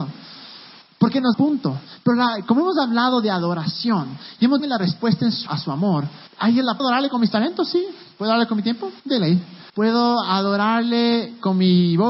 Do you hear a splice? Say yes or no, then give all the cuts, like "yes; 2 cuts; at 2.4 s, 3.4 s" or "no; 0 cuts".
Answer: yes; 7 cuts; at 1.3 s, 4.6 s, 5.5 s, 6.3 s, 6.8 s, 9.0 s, 9.7 s